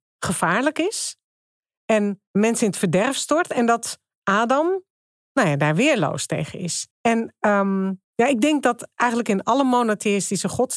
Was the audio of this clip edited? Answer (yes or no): yes